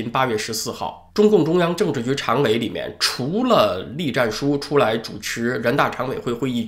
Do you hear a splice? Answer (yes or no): yes